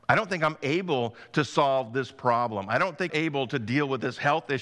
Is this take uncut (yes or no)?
no